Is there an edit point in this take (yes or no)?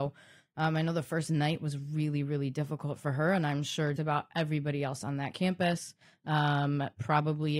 yes